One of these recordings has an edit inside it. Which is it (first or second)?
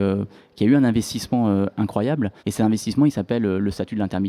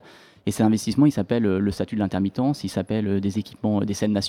first